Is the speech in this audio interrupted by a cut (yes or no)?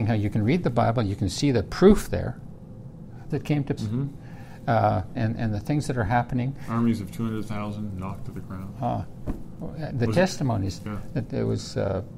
yes